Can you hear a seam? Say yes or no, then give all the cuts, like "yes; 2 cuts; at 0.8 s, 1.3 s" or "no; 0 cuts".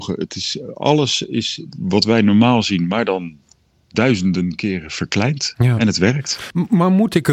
no; 0 cuts